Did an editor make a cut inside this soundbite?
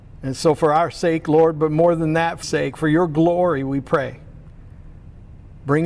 yes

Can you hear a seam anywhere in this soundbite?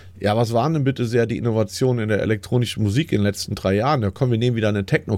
no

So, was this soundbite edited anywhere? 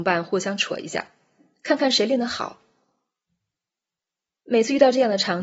no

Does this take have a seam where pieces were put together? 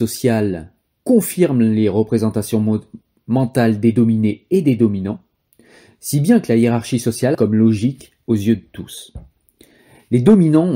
yes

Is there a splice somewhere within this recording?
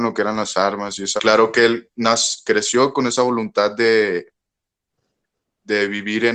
yes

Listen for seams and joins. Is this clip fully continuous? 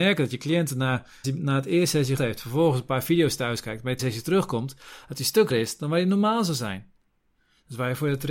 no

